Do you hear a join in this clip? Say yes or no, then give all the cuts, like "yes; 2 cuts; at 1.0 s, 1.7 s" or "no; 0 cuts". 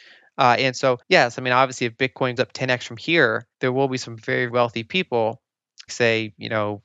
yes; 5 cuts; at 1.0 s, 2.4 s, 3.5 s, 4.5 s, 5.9 s